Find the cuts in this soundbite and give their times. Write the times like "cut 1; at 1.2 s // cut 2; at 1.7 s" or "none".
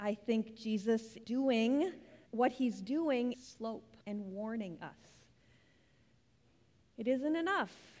cut 1; at 1.2 s // cut 2; at 2.3 s // cut 3; at 3.3 s // cut 4; at 4.0 s